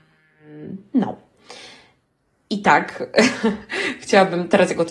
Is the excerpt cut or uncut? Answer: uncut